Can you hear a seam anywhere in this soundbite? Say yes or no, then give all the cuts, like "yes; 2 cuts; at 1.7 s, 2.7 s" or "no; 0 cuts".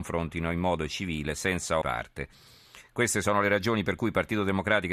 yes; 1 cut; at 1.8 s